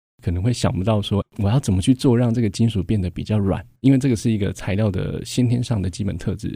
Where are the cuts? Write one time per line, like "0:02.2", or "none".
0:01.2
0:03.8